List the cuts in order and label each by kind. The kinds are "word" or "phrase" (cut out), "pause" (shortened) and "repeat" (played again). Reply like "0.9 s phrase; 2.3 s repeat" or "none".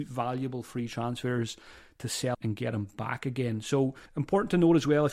2.3 s word; 4.1 s pause